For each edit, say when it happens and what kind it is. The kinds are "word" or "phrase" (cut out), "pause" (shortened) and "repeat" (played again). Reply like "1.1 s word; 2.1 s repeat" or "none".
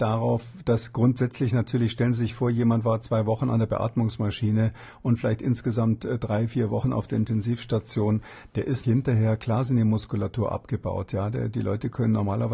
8.8 s word

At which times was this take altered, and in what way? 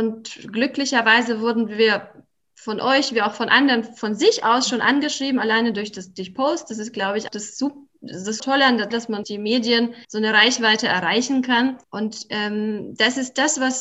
7.3 s word; 8.4 s word; 8.9 s word; 9.2 s word; 10.0 s pause; 11.8 s pause

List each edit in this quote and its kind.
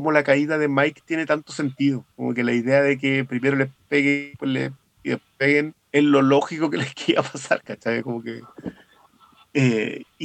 2.1 s pause; 5.8 s pause

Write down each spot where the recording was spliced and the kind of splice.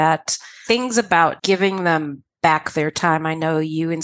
1.4 s word

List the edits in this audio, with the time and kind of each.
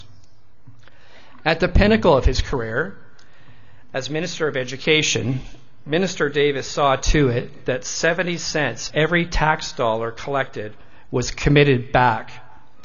8.9 s word

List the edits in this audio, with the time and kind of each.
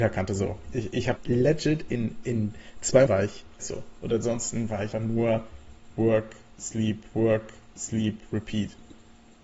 1.2 s word; 3.1 s word; 3.6 s phrase; 4.9 s word; 7.1 s repeat

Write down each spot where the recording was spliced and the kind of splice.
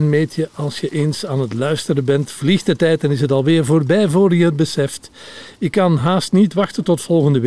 none

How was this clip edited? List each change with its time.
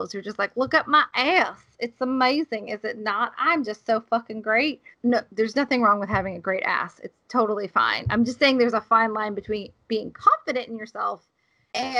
4.9 s pause

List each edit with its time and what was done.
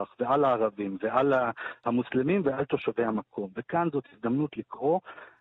none

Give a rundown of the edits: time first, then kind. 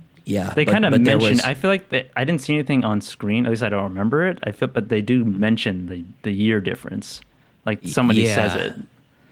none

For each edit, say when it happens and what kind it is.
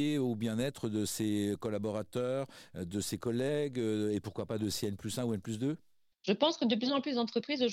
none

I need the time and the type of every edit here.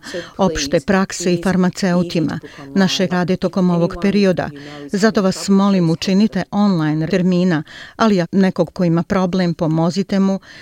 3.1 s word; 7.1 s word; 8.2 s word; 8.7 s word

